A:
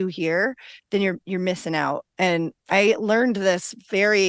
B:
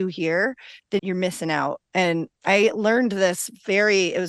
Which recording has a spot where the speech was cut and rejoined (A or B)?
B